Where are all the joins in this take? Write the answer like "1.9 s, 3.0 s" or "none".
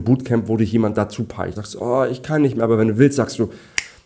1.6 s